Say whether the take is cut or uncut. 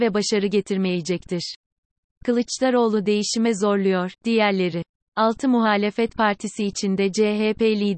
uncut